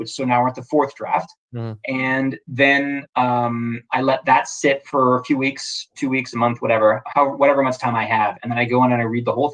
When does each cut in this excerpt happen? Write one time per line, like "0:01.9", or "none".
0:03.1